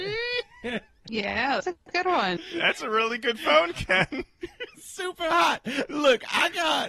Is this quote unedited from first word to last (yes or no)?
no